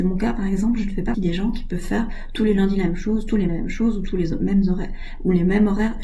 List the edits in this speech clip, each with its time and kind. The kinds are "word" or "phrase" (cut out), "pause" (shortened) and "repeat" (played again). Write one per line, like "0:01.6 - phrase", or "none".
0:01.1 - word
0:03.5 - word

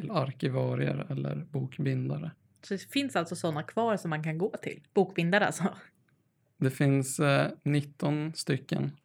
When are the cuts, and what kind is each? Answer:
0:02.4 - pause
0:04.9 - pause

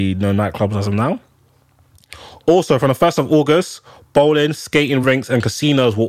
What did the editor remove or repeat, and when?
none

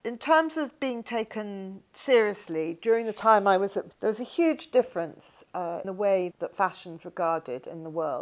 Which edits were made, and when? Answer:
0:03.9 - word
0:05.8 - word
0:06.3 - word

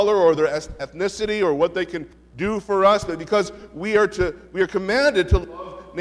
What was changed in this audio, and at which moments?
none

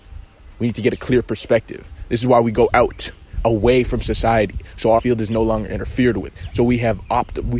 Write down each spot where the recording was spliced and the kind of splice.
0:05.0 - word

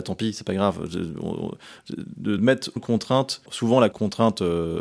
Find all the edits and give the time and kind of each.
0:02.4 - word
0:02.8 - word
0:03.5 - word
0:03.9 - word

